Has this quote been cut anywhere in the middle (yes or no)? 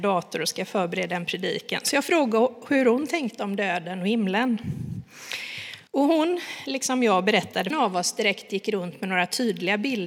yes